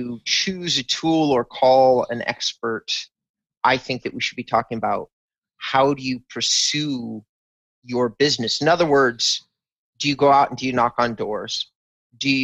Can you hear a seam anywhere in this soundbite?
no; 0 cuts

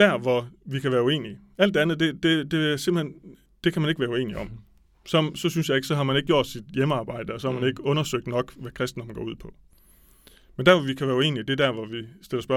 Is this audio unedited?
yes; 0 cuts

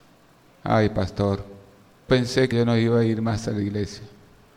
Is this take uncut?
no; 2 cuts; at 2.1 s, 2.5 s

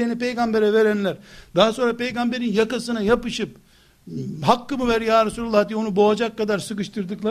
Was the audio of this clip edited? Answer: no; 0 cuts

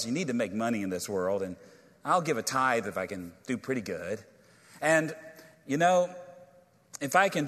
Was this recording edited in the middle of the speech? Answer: no; 0 cuts

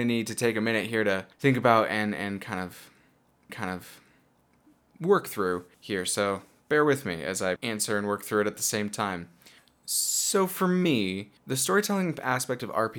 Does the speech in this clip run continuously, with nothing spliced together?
no; 6 cuts; at 1.3 s, 3.5 s, 5.7 s, 7.6 s, 9.6 s, 11.4 s

